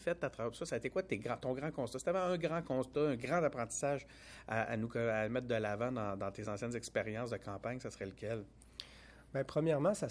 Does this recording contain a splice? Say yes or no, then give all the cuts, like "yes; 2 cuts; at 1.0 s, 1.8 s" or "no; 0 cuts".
no; 0 cuts